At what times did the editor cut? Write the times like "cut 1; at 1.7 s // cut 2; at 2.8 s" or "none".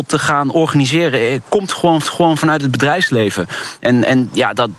cut 1; at 2.0 s